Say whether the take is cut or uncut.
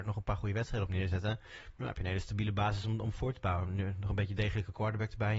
uncut